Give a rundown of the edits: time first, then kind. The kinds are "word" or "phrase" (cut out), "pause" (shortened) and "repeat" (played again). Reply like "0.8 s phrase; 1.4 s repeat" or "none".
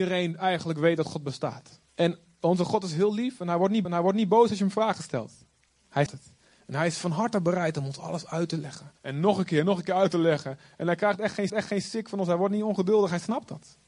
1.9 s pause; 3.8 s repeat; 6.1 s word; 9.0 s pause; 11.5 s repeat